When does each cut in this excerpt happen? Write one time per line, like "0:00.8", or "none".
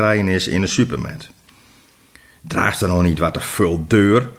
none